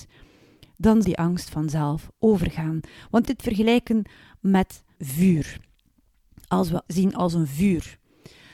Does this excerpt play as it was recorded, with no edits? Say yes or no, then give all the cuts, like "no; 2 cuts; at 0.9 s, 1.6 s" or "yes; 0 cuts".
no; 4 cuts; at 1.0 s, 3.3 s, 5.0 s, 6.9 s